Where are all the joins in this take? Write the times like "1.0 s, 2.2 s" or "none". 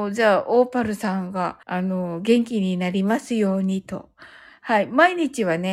1.6 s